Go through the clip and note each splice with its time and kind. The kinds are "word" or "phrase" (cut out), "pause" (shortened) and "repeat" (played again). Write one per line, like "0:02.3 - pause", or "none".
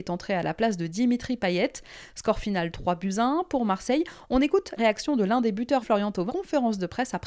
0:04.8 - word
0:05.8 - word
0:06.3 - word